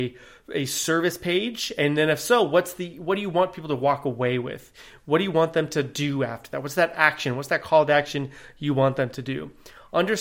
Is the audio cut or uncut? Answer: uncut